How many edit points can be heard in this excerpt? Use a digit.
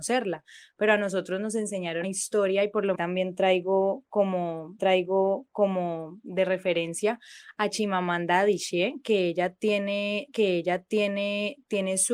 4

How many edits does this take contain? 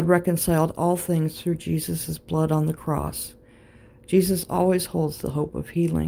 0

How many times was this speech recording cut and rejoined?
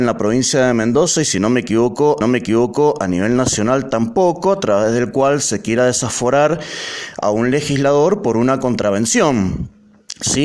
1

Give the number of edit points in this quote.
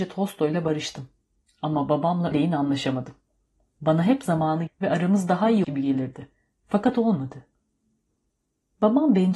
3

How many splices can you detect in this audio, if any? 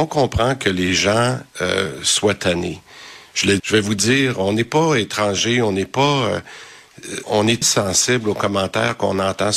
3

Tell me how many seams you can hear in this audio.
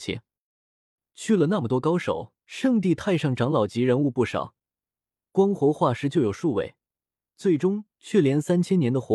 1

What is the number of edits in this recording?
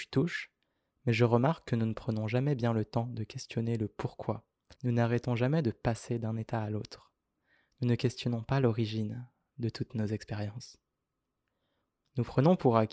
1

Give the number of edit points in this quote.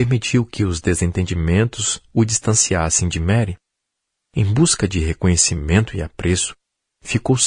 0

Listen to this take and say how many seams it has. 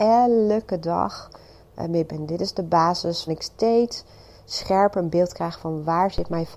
2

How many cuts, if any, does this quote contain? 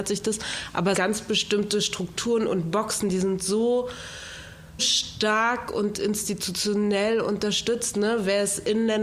2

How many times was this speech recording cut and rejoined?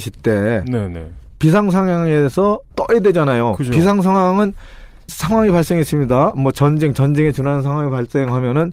2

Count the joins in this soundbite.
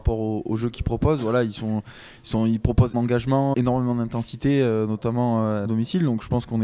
3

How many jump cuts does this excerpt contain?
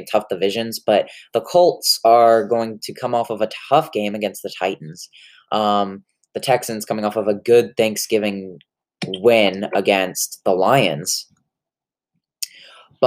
0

